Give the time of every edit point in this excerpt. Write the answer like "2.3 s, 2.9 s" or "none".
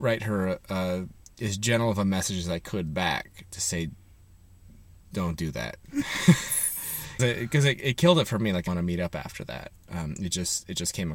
7.2 s, 8.7 s

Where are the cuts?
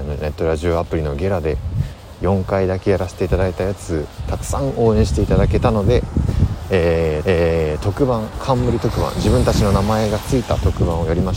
7.2 s

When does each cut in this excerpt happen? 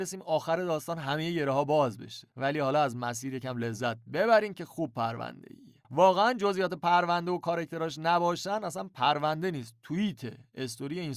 2.3 s, 5.8 s

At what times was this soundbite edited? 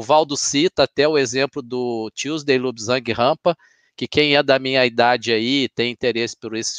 none

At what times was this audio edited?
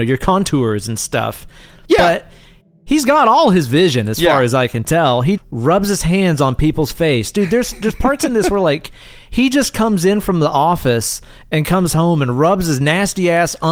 5.4 s

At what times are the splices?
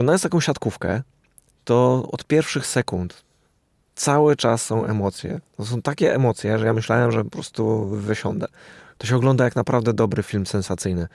none

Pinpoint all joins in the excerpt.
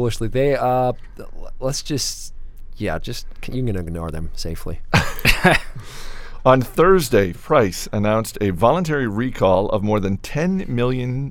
7.3 s

